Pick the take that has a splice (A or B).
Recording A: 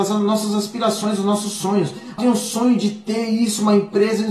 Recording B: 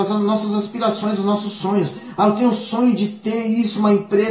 A